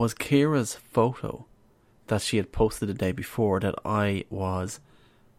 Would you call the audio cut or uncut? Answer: uncut